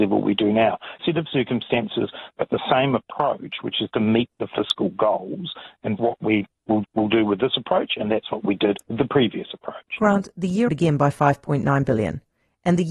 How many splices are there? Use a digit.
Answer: 5